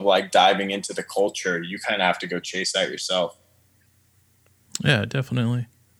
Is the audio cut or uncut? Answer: uncut